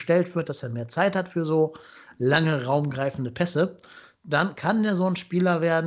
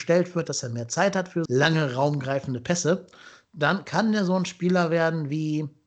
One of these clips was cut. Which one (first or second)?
second